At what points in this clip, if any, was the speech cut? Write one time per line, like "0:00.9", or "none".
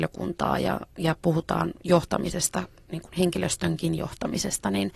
none